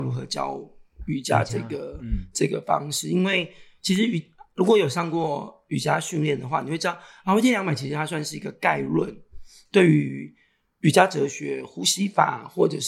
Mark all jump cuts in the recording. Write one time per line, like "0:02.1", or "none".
none